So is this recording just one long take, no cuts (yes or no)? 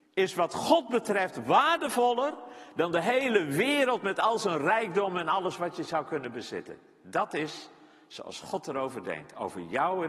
yes